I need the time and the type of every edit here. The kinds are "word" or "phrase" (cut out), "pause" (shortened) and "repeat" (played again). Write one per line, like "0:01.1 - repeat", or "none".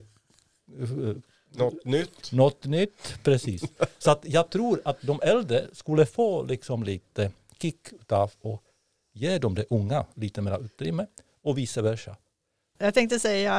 none